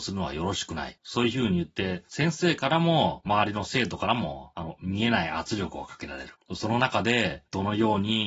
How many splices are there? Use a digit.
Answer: 0